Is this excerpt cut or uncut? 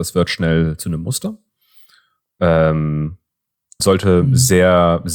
cut